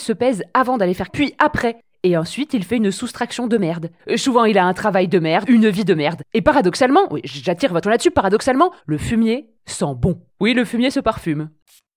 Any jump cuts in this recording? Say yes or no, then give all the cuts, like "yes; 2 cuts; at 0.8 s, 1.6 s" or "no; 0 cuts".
yes; 7 cuts; at 1.1 s, 4.0 s, 5.4 s, 7.8 s, 8.8 s, 9.6 s, 10.3 s